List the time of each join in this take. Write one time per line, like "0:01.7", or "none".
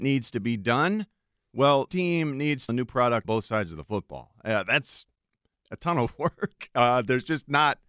0:01.9
0:02.7
0:03.2